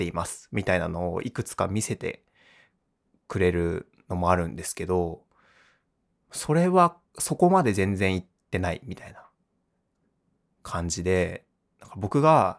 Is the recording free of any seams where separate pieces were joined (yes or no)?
yes